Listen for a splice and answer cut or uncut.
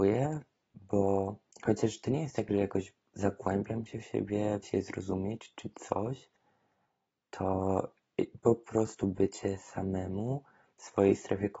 cut